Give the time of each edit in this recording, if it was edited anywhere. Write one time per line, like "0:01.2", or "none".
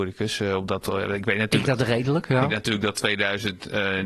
0:01.6
0:02.5